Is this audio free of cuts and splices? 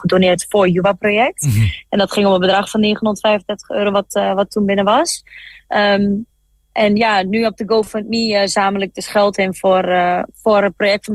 yes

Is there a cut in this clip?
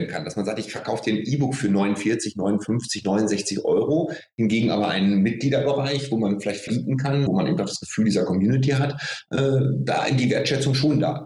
yes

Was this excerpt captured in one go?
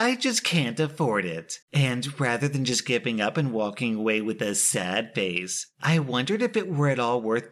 no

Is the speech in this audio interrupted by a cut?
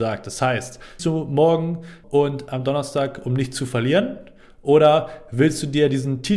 yes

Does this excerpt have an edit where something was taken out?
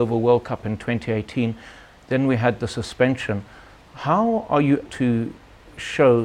yes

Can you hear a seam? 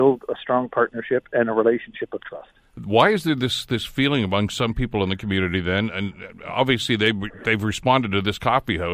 no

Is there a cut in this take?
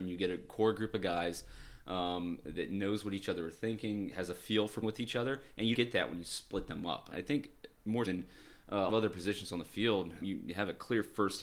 yes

